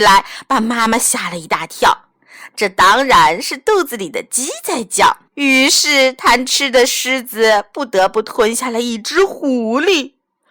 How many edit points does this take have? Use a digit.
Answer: 1